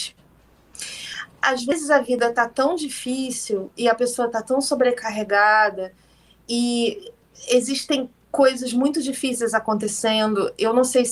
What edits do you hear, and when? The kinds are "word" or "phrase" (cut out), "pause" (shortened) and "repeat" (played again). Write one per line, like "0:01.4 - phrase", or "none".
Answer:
none